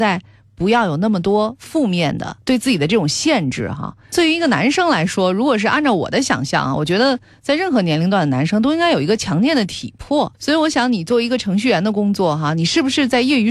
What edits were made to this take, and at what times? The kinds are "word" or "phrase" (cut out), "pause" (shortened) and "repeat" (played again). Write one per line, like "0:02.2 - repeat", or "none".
0:02.4 - pause
0:10.3 - pause